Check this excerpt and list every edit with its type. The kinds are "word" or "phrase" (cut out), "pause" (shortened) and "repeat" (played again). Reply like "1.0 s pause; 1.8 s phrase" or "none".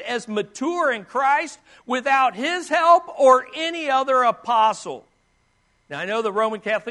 none